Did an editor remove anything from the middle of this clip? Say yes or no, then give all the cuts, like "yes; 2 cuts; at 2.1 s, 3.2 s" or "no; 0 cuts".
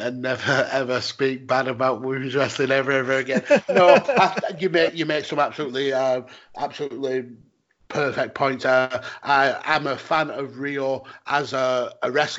no; 0 cuts